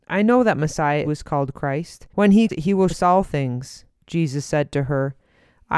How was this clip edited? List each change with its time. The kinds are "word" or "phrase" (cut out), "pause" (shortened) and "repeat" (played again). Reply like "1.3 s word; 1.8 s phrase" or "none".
1.0 s phrase; 2.1 s pause; 2.5 s word; 2.9 s word; 3.9 s pause

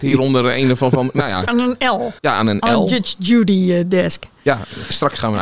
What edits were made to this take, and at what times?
1.5 s phrase; 2.2 s pause

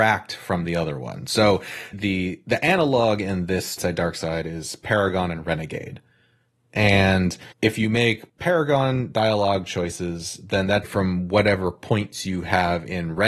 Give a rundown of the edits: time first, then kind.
1.9 s word; 3.8 s phrase; 7.5 s pause; 8.3 s pause; 10.8 s phrase

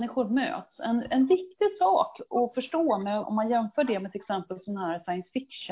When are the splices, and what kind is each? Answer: 3.2 s word

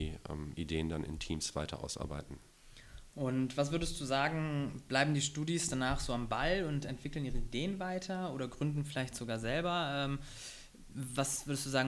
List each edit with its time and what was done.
none

